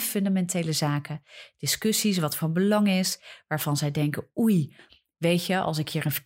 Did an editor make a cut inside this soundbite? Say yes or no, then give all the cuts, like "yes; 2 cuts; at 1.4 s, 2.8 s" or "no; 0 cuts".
yes; 1 cut; at 2.4 s